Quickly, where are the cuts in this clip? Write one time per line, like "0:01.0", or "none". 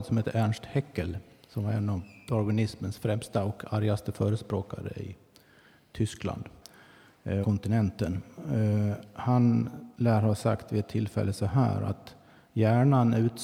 0:07.4
0:09.9